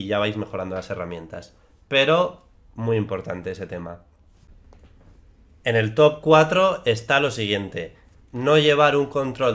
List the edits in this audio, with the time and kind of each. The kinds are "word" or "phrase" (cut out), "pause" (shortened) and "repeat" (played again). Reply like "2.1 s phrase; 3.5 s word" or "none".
none